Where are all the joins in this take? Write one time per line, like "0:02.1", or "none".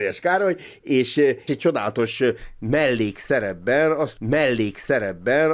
0:01.5
0:04.2